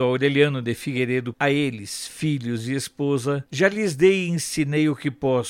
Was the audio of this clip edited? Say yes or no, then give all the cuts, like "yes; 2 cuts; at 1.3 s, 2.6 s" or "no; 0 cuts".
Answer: yes; 1 cut; at 1.3 s